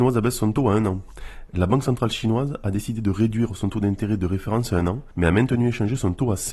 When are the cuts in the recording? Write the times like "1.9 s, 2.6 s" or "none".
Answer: 5.1 s